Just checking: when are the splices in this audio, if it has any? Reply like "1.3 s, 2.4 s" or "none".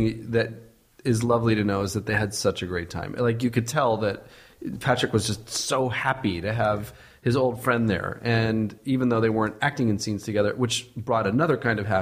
none